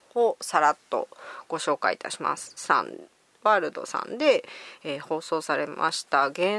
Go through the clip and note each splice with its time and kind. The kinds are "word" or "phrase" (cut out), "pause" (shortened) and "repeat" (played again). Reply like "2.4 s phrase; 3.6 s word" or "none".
2.6 s phrase